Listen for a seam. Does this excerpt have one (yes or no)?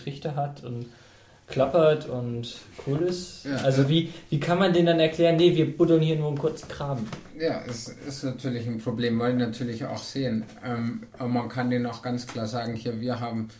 no